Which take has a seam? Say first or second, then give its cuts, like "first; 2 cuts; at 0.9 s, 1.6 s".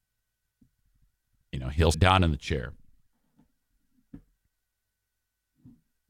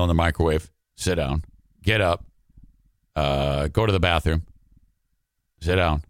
first; 1 cut; at 1.9 s